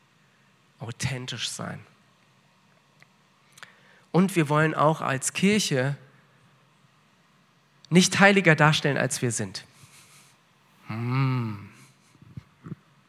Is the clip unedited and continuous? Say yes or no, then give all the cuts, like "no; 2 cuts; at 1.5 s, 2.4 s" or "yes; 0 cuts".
yes; 0 cuts